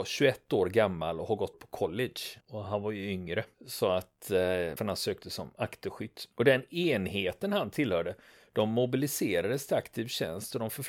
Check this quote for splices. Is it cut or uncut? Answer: cut